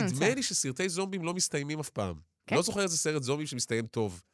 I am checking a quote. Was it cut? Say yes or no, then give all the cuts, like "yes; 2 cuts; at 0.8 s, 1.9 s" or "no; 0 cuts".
no; 0 cuts